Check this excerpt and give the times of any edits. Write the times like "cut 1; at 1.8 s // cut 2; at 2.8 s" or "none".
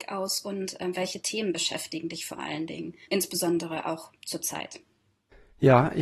cut 1; at 3.0 s